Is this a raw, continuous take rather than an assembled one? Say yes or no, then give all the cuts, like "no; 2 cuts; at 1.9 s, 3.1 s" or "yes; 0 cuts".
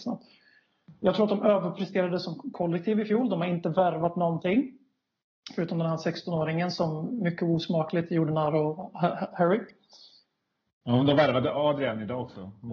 yes; 0 cuts